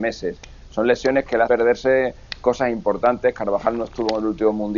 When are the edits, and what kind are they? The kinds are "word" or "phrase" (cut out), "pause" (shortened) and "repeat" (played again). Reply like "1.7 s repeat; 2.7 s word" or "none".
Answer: 1.5 s word